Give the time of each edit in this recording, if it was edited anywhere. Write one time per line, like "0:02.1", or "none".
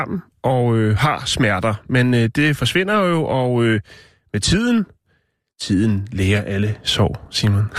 none